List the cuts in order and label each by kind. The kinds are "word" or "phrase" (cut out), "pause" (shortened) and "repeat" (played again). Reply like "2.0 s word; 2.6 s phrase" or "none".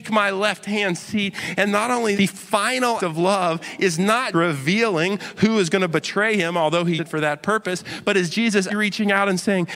1.7 s word; 2.1 s word; 3.0 s word; 4.3 s word; 7.0 s word; 8.7 s word